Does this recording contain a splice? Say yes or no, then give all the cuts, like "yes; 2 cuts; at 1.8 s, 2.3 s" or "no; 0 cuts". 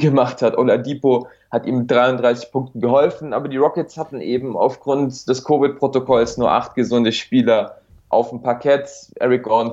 yes; 1 cut; at 7.9 s